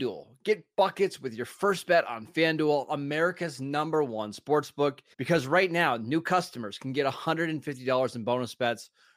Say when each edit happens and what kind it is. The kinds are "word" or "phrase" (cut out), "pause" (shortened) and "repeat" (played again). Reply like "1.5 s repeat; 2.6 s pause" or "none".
5.1 s pause